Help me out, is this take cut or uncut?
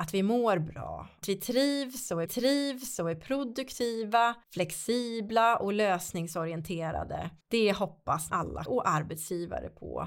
cut